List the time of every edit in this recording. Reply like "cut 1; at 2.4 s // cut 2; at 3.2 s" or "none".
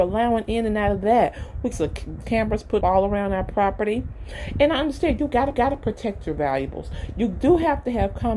cut 1; at 1.7 s // cut 2; at 2.2 s // cut 3; at 2.8 s // cut 4; at 5.5 s

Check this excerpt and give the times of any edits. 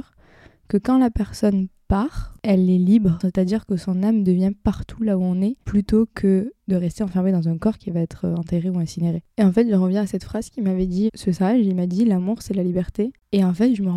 cut 1; at 5.6 s // cut 2; at 11.1 s

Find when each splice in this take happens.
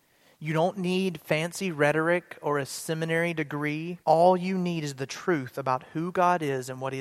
cut 1; at 4.0 s

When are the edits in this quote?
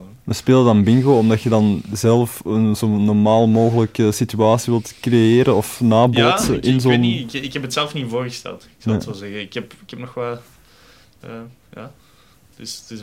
none

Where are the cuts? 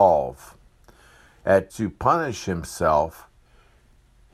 cut 1; at 1.7 s

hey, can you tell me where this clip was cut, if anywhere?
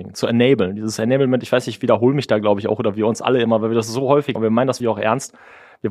cut 1; at 4.3 s // cut 2; at 4.8 s

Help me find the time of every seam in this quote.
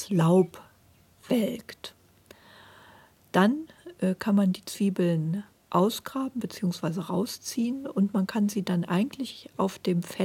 none

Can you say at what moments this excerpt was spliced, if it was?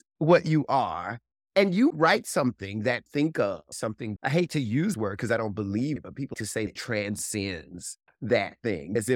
cut 1; at 1.9 s // cut 2; at 3.1 s // cut 3; at 3.7 s // cut 4; at 4.2 s // cut 5; at 4.9 s // cut 6; at 6.0 s // cut 7; at 6.3 s // cut 8; at 6.7 s

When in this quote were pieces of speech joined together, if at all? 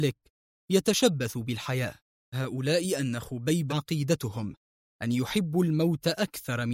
cut 1; at 2.3 s // cut 2; at 3.7 s

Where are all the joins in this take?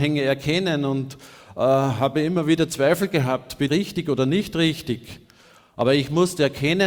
cut 1; at 3.7 s

